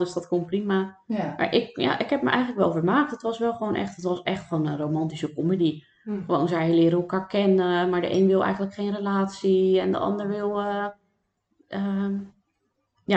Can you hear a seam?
no; 0 cuts

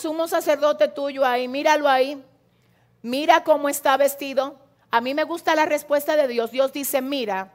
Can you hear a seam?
no; 0 cuts

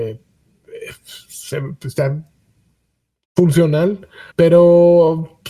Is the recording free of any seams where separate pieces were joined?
no; 1 cut; at 4.3 s

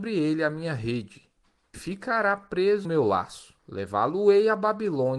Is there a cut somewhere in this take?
yes; 3 cuts; at 1.7 s, 2.8 s, 3.6 s

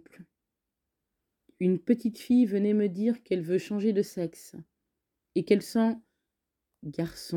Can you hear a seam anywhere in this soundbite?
yes; 1 cut; at 5.6 s

